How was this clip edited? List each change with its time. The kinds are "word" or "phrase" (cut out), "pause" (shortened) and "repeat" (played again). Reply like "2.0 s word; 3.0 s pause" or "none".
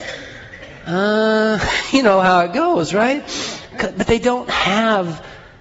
none

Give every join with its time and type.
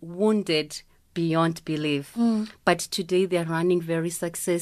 none

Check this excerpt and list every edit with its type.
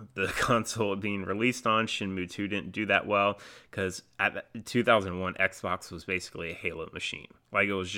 none

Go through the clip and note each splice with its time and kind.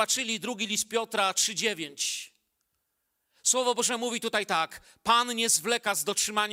none

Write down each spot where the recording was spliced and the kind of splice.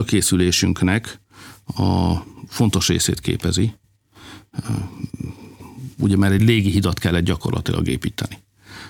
none

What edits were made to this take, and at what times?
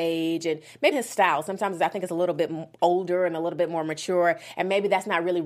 0.9 s word

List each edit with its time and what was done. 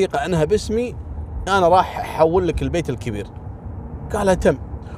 1.5 s word

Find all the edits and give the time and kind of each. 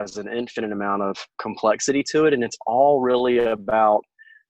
1.3 s word

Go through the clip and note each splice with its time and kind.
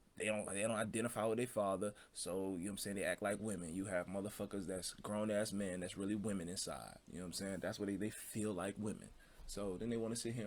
7.0 s pause

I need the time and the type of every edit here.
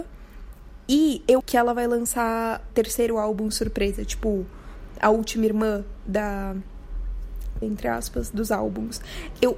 1.4 s phrase; 2.7 s word; 7.6 s word

